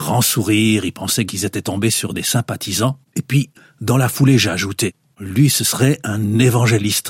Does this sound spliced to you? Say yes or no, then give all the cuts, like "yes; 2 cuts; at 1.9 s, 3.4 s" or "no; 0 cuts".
no; 0 cuts